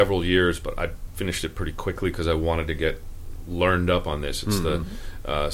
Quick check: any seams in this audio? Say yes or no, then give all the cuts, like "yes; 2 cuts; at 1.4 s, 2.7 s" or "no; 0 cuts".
no; 0 cuts